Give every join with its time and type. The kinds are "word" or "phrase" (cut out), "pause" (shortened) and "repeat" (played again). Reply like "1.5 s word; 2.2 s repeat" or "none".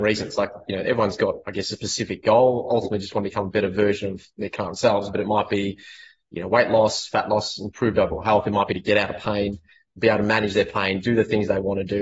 none